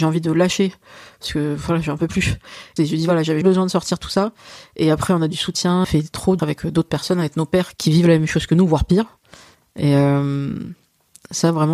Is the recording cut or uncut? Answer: cut